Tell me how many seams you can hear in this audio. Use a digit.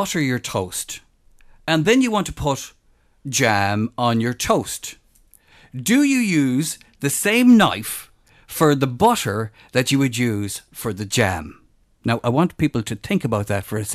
0